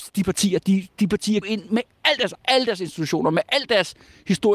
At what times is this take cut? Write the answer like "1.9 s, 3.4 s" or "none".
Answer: 1.4 s, 2.3 s

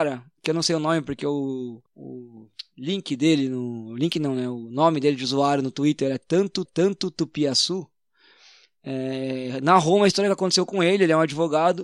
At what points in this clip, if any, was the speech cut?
1.9 s, 6.7 s

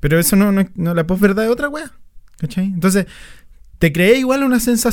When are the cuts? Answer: 2.3 s

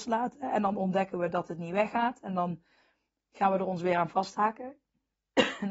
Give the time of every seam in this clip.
none

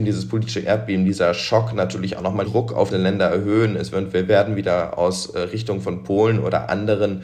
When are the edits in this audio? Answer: 2.4 s, 2.9 s

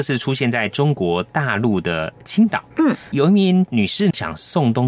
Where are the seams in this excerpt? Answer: 2.7 s

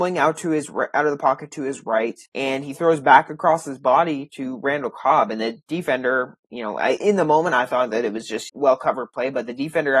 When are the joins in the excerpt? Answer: 2.3 s, 7.0 s, 8.5 s

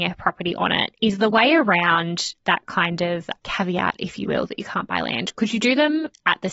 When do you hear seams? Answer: none

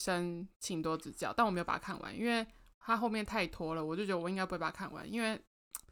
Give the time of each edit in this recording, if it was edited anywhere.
none

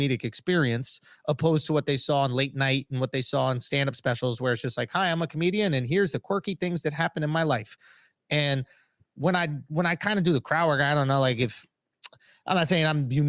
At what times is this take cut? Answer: none

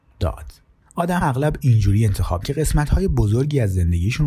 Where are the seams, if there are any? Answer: 1.2 s, 2.4 s

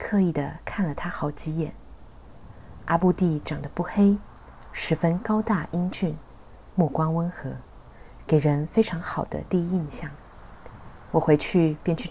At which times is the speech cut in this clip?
6.7 s

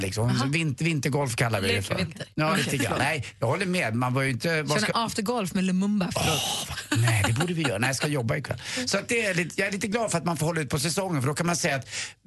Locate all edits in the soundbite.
2.3 s

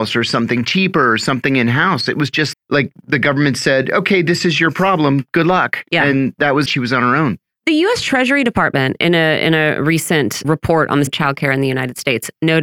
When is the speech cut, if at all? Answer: 2.5 s, 6.7 s, 10.4 s, 11.1 s

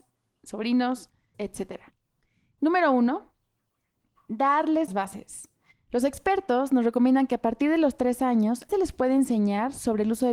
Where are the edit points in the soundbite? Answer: 1.3 s, 4.9 s, 8.7 s

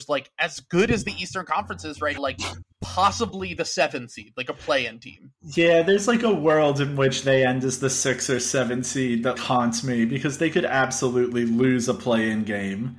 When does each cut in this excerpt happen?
2.2 s, 9.4 s

